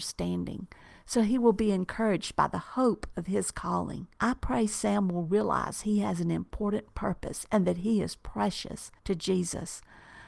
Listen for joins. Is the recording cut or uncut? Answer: cut